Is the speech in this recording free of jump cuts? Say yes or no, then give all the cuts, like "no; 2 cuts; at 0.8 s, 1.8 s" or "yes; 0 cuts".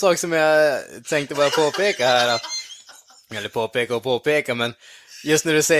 yes; 0 cuts